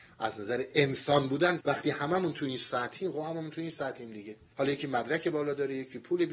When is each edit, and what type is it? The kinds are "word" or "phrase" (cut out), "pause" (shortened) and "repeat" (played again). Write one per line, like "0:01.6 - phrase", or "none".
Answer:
0:01.6 - phrase
0:04.5 - pause